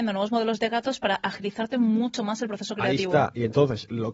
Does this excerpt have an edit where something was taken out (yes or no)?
no